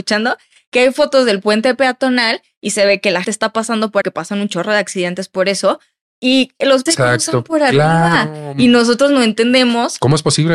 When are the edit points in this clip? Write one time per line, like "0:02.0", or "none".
0:03.2
0:04.0
0:06.9